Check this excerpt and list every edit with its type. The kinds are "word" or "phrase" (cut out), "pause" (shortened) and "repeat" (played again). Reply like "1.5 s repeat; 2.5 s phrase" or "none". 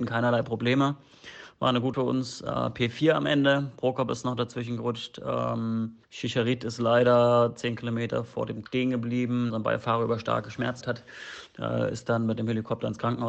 1.9 s word; 6.0 s pause; 8.7 s phrase; 9.5 s word; 10.8 s word